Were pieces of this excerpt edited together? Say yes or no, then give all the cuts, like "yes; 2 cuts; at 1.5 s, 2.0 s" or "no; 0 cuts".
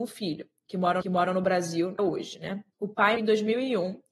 yes; 4 cuts; at 1.0 s, 2.0 s, 2.7 s, 3.2 s